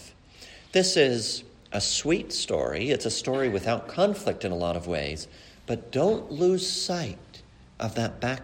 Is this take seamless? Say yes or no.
yes